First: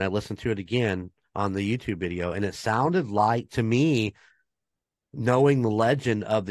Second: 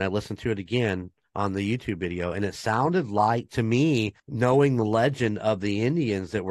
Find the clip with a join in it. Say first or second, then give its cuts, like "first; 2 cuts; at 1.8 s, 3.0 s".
second; 1 cut; at 4.2 s